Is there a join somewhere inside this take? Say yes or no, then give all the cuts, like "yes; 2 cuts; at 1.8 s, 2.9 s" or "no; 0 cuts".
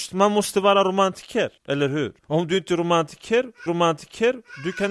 yes; 3 cuts; at 1.6 s, 2.2 s, 3.7 s